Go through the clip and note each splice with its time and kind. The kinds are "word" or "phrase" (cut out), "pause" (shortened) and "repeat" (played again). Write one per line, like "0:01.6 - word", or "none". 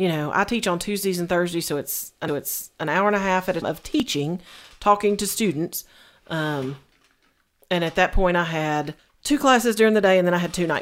0:02.3 - repeat
0:03.6 - word
0:09.0 - pause